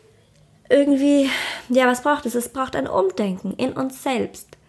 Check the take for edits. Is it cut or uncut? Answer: uncut